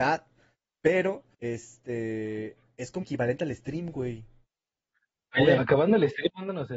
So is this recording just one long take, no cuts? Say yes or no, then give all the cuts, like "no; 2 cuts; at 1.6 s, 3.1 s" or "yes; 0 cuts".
no; 3 cuts; at 1.3 s, 3.0 s, 5.6 s